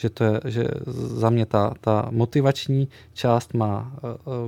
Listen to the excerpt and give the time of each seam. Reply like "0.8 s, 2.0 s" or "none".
none

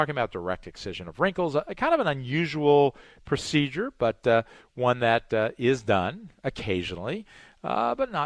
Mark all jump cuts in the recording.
none

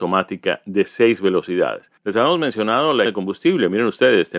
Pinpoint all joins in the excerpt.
2.0 s, 3.1 s

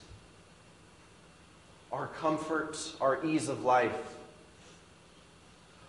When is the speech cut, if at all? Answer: none

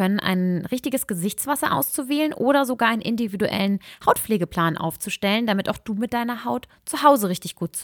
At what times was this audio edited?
none

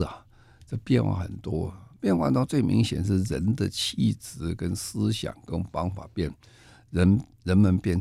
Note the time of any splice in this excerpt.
none

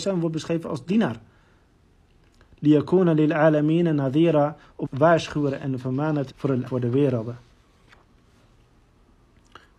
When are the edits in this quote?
4.8 s, 6.3 s, 6.7 s

